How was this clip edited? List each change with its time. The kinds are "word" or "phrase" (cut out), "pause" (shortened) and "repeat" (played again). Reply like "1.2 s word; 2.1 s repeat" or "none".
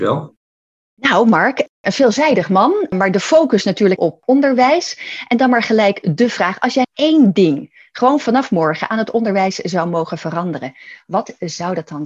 4.0 s phrase; 6.8 s word